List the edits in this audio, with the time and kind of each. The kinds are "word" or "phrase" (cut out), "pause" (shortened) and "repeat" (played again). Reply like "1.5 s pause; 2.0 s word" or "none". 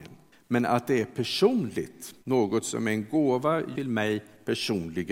2.2 s pause; 3.8 s word